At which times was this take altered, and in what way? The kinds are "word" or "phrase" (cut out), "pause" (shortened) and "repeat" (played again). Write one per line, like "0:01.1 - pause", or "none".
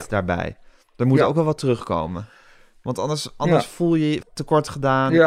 0:04.2 - phrase